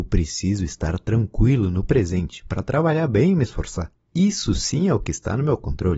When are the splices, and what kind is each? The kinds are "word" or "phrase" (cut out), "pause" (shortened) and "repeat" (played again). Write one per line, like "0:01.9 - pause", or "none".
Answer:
none